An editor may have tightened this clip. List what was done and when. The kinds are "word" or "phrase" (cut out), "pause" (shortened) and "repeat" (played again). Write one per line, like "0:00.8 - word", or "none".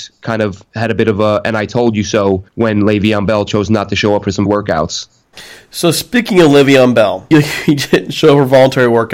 0:02.5 - pause
0:04.5 - word
0:07.3 - word